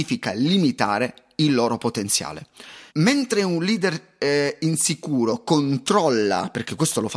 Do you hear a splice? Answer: yes; 1 cut; at 2.9 s

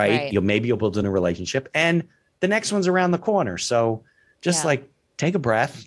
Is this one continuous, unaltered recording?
yes; 0 cuts

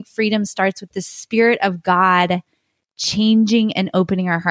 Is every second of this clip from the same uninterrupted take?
yes; 0 cuts

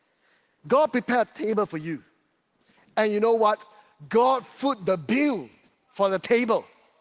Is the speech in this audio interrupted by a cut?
no; 0 cuts

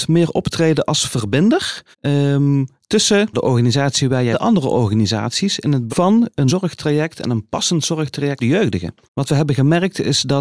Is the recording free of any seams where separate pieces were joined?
no; 7 cuts; at 1.9 s, 3.3 s, 4.3 s, 5.9 s, 6.5 s, 8.4 s, 9.0 s

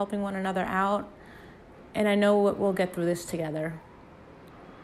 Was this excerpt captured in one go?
yes; 0 cuts

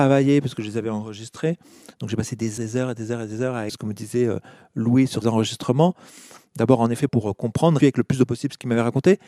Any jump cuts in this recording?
yes; 6 cuts; at 2.6 s, 3.7 s, 5.2 s, 7.1 s, 7.8 s, 8.3 s

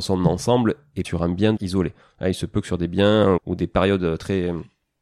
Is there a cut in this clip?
yes; 3 cuts; at 1.0 s, 1.6 s, 3.4 s

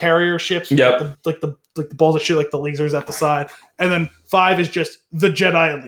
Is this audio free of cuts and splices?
yes; 0 cuts

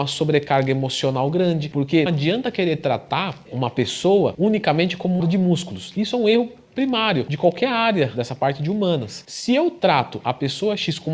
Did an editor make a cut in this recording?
yes; 3 cuts; at 2.1 s, 5.2 s, 7.3 s

